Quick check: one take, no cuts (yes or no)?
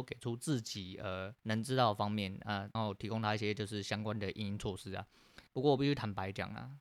no